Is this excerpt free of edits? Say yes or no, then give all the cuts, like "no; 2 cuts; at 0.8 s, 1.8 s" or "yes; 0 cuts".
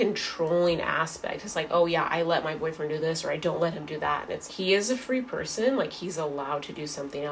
no; 1 cut; at 4.5 s